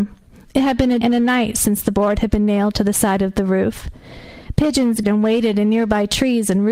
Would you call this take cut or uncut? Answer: cut